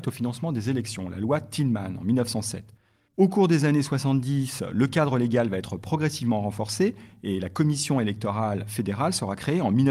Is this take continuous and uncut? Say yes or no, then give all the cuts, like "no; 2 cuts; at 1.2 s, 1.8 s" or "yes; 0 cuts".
yes; 0 cuts